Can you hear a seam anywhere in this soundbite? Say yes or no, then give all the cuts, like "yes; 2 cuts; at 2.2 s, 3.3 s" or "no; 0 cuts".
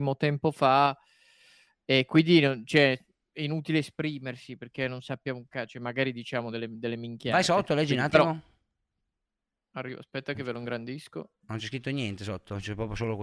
no; 0 cuts